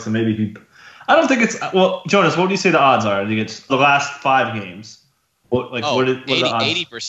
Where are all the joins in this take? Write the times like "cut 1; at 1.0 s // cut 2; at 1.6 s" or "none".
cut 1; at 3.7 s